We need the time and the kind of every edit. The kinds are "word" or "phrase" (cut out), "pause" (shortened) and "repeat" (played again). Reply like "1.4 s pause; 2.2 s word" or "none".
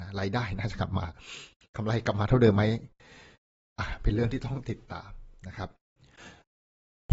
none